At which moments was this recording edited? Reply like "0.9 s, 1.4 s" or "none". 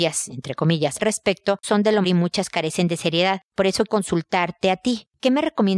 1.0 s, 1.6 s, 2.0 s, 3.9 s